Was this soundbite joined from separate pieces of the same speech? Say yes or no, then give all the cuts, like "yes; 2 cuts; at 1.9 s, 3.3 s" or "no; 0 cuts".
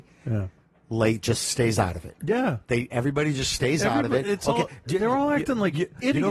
no; 0 cuts